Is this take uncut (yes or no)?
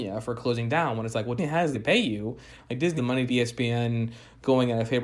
no